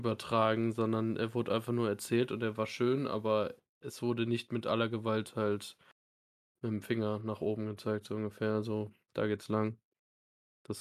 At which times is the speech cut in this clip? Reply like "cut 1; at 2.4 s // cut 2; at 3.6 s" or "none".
none